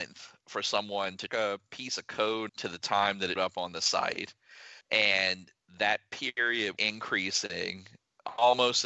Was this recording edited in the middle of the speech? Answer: yes; 5 cuts; at 1.3 s, 2.5 s, 3.4 s, 4.8 s, 6.8 s

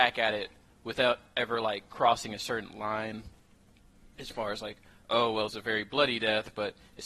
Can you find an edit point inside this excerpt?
yes; 1 cut; at 5.5 s

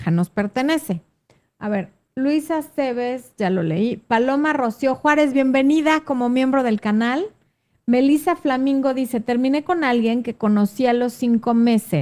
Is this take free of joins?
yes; 0 cuts

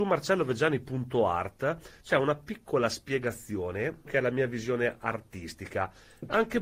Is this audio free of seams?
no; 1 cut; at 4.1 s

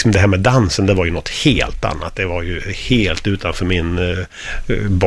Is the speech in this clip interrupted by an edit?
no; 0 cuts

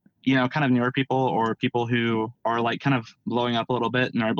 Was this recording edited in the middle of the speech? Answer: yes; 1 cut; at 2.3 s

